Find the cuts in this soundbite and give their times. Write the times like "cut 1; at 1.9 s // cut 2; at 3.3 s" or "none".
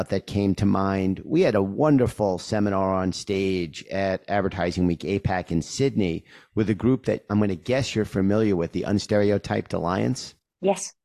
none